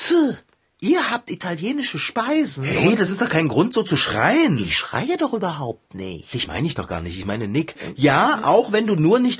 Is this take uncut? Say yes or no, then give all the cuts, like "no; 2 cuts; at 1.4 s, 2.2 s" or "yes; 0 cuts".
yes; 0 cuts